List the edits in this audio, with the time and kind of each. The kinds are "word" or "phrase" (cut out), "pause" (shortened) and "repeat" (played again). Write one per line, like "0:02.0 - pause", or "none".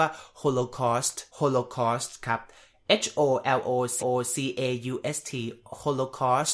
0:01.3 - pause
0:04.0 - repeat